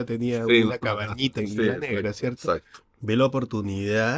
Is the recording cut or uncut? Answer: cut